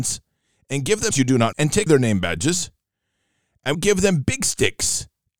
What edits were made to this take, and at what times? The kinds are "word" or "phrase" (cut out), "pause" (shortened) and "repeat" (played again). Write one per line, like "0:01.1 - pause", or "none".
0:01.1 - word
0:01.5 - word
0:01.9 - word
0:03.7 - word